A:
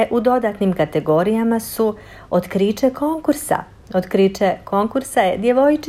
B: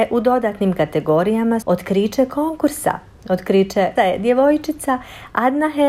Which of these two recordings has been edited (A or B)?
B